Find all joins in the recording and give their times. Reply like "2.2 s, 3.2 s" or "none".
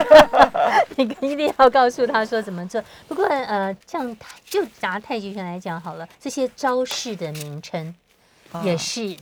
3.8 s, 6.1 s